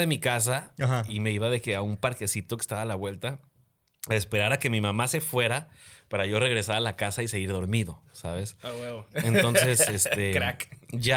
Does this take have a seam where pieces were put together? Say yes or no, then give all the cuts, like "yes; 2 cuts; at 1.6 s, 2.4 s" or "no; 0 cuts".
yes; 1 cut; at 1.1 s